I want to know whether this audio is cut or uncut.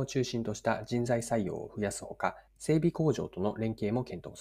cut